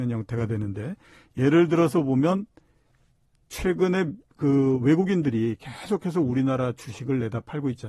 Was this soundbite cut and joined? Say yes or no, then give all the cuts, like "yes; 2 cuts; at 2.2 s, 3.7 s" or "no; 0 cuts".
no; 0 cuts